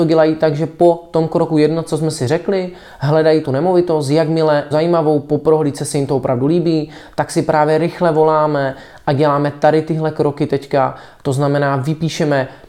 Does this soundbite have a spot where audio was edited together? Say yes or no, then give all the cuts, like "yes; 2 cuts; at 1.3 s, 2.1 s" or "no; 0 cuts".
yes; 2 cuts; at 3.4 s, 4.7 s